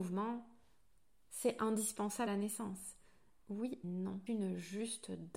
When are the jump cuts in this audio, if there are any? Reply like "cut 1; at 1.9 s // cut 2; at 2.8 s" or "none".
cut 1; at 2.3 s // cut 2; at 3.8 s // cut 3; at 4.3 s